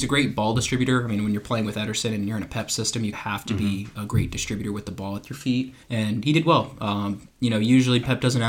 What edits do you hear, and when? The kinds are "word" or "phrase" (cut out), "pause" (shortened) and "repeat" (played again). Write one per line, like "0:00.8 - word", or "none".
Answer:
0:03.1 - word
0:05.8 - pause